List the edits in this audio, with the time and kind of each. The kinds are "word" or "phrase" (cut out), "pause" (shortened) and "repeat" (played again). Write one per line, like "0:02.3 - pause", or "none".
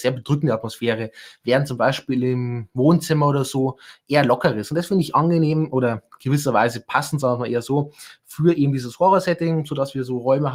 none